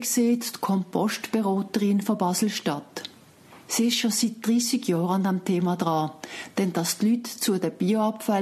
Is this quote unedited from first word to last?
yes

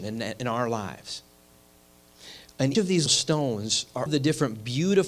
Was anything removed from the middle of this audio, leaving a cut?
yes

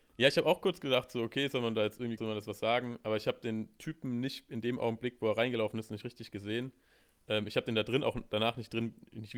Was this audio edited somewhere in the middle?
yes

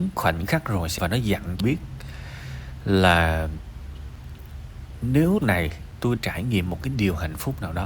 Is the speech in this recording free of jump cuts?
no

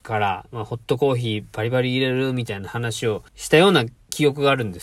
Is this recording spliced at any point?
yes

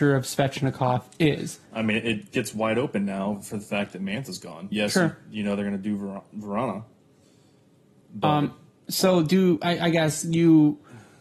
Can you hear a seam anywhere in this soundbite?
yes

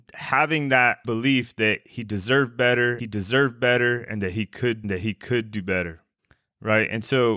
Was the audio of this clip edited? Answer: yes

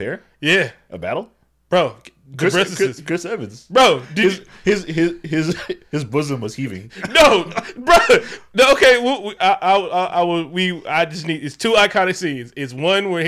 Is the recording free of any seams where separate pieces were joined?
yes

